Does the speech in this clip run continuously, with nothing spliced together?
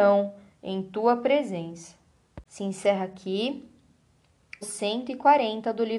no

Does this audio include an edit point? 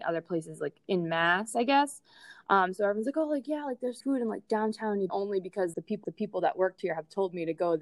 yes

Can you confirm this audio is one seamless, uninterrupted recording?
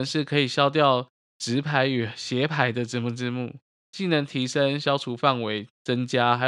yes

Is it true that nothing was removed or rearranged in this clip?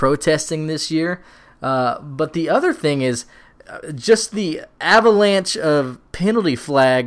yes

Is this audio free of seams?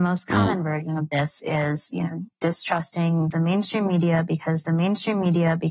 no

